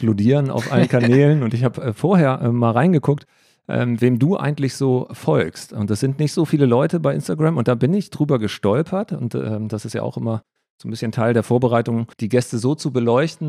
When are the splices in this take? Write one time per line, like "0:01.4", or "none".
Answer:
0:12.1